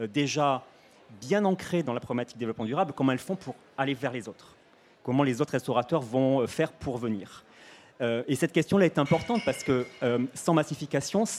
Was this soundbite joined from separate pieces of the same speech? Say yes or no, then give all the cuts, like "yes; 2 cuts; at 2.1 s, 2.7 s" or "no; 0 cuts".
no; 0 cuts